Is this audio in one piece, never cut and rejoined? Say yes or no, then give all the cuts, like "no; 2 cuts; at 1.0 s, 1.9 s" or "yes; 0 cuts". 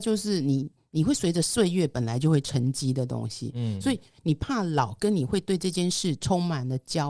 yes; 0 cuts